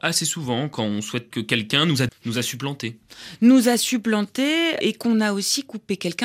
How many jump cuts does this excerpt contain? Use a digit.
3